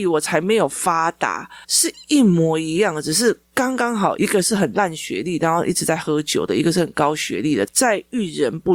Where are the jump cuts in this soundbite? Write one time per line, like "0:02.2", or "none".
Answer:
0:01.6